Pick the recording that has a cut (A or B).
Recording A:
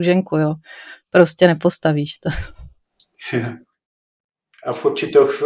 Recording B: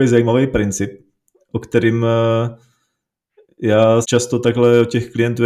B